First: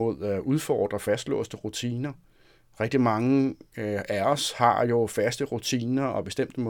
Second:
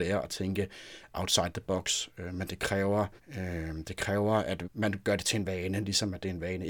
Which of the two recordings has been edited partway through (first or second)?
second